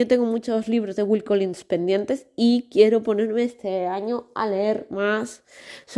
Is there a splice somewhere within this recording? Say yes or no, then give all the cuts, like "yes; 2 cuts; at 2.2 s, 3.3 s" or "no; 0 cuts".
no; 0 cuts